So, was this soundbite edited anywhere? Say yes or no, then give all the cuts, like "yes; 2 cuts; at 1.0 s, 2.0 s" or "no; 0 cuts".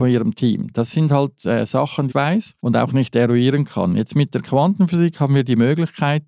yes; 2 cuts; at 2.1 s, 2.6 s